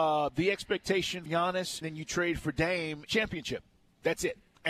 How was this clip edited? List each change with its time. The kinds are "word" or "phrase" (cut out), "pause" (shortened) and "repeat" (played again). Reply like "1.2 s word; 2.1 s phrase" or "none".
1.3 s word; 1.8 s word; 3.1 s word